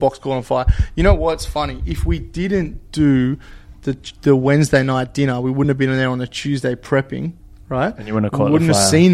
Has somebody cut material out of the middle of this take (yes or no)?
no